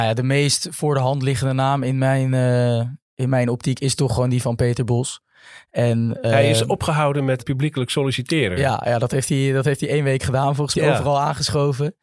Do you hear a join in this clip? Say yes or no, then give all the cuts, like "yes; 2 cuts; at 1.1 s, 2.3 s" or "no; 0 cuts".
yes; 2 cuts; at 7.4 s, 10.7 s